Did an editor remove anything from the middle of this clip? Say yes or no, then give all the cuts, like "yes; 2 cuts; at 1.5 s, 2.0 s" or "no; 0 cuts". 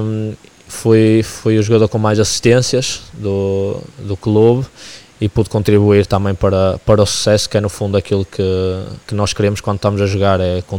yes; 2 cuts; at 3.9 s, 9.0 s